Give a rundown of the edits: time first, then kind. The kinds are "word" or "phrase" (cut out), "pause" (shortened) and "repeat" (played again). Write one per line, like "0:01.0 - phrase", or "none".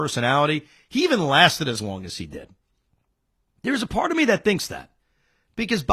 none